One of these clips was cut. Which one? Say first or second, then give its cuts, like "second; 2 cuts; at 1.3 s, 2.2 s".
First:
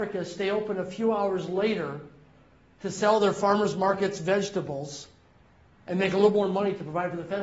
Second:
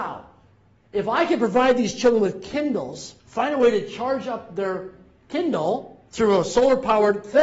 second; 2 cuts; at 3.2 s, 6.1 s